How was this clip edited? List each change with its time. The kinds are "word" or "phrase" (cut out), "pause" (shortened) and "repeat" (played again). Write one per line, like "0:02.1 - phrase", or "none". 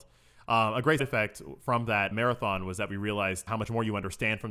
0:01.0 - word
0:02.1 - word
0:03.5 - word